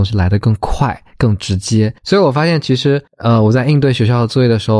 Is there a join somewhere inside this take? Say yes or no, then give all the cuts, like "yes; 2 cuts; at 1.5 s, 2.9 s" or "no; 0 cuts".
yes; 2 cuts; at 2.0 s, 3.1 s